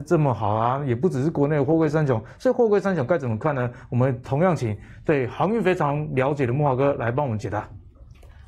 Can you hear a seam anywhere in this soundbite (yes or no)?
no